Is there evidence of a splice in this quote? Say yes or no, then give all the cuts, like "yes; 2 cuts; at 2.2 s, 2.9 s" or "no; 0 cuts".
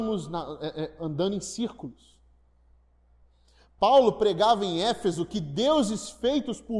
no; 0 cuts